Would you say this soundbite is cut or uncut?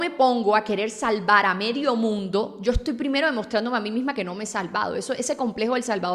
uncut